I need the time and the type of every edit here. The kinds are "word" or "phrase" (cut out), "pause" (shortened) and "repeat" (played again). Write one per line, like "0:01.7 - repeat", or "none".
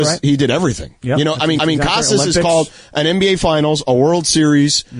0:01.6 - repeat